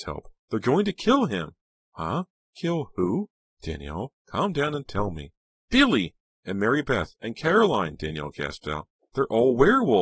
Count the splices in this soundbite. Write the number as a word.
zero